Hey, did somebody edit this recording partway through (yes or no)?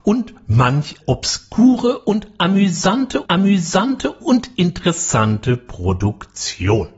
yes